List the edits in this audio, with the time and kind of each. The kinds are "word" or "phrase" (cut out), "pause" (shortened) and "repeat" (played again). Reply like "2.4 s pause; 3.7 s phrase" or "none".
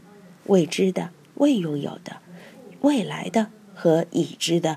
none